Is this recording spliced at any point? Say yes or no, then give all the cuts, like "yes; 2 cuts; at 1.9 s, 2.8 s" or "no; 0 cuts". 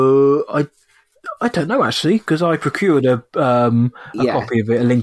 no; 0 cuts